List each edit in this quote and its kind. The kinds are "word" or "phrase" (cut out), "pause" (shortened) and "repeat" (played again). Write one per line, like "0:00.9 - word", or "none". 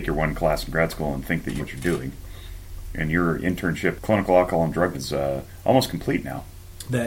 0:01.6 - word
0:04.0 - word
0:04.9 - word